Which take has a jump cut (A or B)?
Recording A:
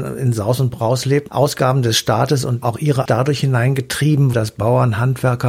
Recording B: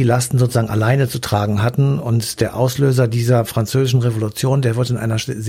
A